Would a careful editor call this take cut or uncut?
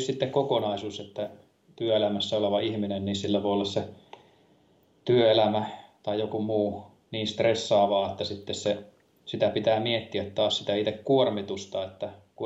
uncut